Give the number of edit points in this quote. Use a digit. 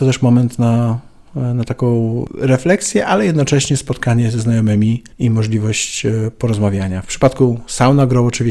1